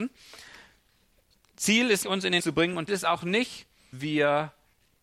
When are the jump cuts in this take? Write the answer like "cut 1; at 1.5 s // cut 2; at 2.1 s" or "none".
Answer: cut 1; at 2.0 s // cut 2; at 2.4 s // cut 3; at 2.9 s // cut 4; at 3.9 s